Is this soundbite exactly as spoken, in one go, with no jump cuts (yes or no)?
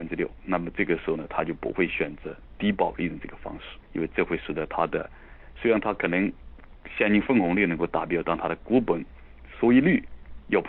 no